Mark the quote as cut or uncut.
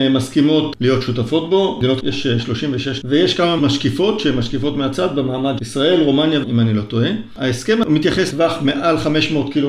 cut